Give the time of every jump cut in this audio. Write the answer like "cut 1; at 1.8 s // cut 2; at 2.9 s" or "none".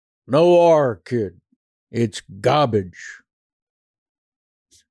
cut 1; at 1.6 s